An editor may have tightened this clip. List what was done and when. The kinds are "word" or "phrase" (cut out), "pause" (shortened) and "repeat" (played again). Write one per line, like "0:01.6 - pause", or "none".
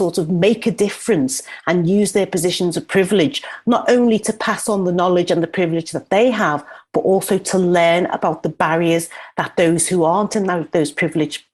none